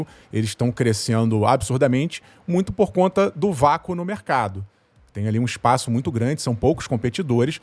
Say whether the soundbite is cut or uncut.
uncut